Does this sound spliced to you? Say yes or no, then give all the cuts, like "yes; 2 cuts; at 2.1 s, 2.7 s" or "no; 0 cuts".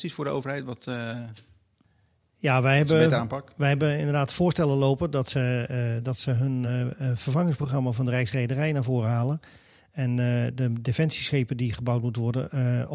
no; 0 cuts